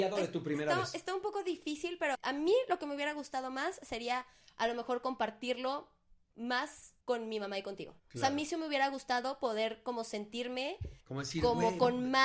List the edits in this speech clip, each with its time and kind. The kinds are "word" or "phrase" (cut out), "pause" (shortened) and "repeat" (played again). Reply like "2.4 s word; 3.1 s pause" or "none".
2.1 s word; 7.0 s pause; 8.0 s pause; 11.0 s pause